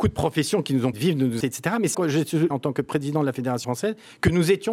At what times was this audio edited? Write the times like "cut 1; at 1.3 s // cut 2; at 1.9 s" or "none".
cut 1; at 0.9 s // cut 2; at 1.4 s // cut 3; at 1.9 s // cut 4; at 2.5 s // cut 5; at 3.6 s